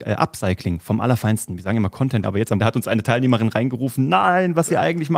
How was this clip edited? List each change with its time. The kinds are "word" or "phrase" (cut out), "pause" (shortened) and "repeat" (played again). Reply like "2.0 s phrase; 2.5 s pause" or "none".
2.2 s word; 2.6 s word